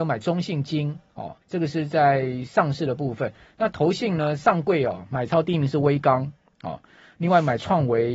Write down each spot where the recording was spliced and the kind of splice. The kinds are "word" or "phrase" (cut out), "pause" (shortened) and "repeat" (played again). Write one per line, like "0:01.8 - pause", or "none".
0:01.4 - pause